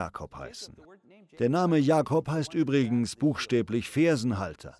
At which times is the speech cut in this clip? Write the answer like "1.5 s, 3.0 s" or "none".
none